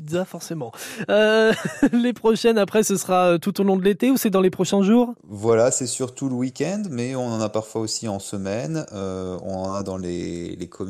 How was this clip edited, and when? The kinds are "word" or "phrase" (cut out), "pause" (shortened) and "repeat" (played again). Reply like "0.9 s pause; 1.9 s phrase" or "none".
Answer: none